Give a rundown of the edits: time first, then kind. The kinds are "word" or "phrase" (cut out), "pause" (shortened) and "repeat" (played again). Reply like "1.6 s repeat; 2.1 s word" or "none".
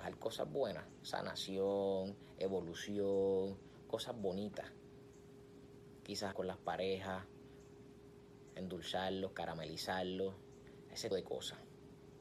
6.3 s word; 11.1 s word